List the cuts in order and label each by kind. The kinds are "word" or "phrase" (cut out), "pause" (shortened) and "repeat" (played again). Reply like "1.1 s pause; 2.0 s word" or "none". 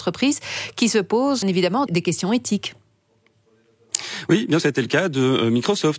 1.4 s word; 1.9 s word; 4.6 s word